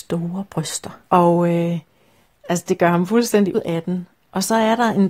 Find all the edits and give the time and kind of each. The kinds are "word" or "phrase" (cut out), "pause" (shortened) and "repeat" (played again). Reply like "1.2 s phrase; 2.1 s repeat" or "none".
1.1 s pause; 3.5 s word

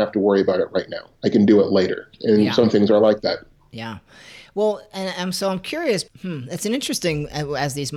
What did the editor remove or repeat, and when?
6.1 s word

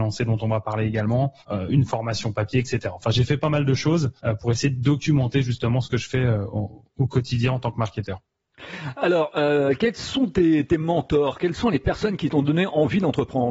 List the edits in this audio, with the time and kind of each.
1.4 s pause; 4.2 s pause

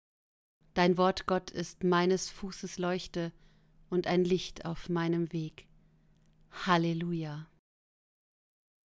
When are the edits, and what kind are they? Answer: none

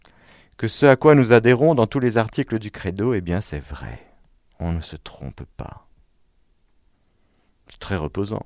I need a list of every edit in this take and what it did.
none

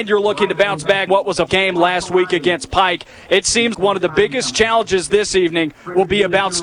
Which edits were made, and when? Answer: 1.1 s word; 1.5 s word; 3.7 s word

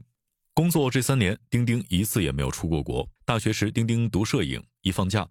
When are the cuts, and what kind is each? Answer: 3.2 s pause

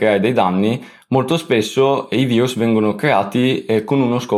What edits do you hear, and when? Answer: none

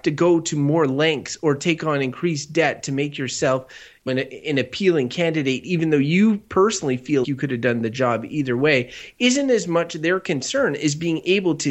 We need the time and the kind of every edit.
4.1 s word; 7.2 s word

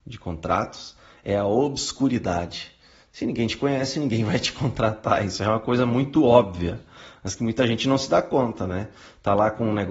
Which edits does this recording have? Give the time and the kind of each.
none

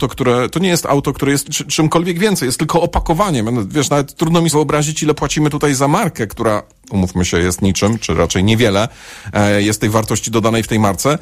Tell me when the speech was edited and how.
1.4 s word; 4.5 s word

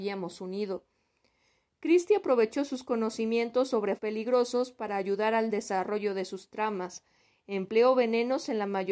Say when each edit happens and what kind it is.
4.0 s word

